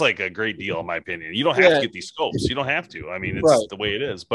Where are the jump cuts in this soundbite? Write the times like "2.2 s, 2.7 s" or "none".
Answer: none